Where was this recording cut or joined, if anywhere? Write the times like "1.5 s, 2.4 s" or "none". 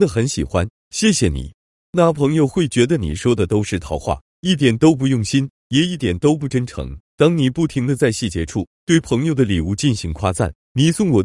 7.0 s